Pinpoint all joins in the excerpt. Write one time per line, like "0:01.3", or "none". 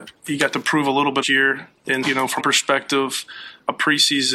0:01.2
0:02.0
0:02.4